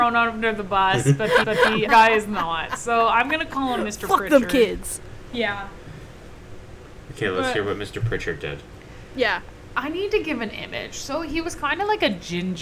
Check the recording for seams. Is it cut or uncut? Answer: cut